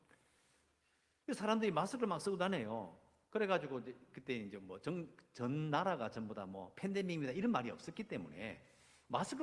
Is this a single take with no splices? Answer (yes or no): yes